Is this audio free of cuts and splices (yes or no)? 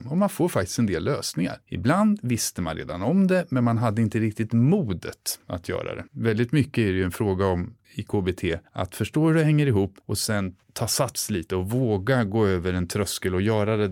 no